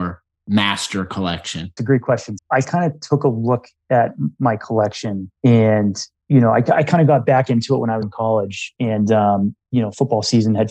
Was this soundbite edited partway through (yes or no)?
yes